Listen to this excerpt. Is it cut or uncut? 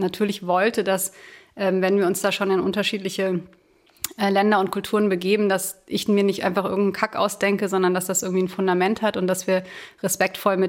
uncut